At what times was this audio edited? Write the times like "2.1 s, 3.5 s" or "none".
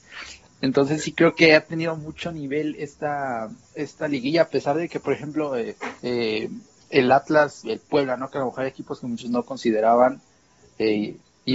3.6 s, 6.0 s, 7.6 s